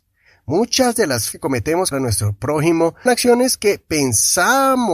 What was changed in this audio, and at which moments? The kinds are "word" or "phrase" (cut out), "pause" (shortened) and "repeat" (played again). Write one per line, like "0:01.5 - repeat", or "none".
0:01.3 - word
0:01.9 - word
0:03.1 - word